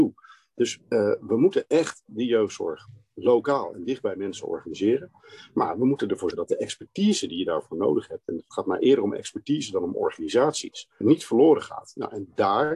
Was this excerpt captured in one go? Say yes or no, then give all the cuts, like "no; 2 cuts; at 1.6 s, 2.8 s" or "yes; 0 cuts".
no; 2 cuts; at 6.3 s, 11.0 s